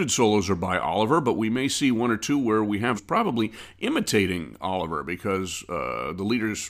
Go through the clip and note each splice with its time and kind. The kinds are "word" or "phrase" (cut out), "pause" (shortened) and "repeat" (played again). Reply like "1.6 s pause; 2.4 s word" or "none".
2.9 s phrase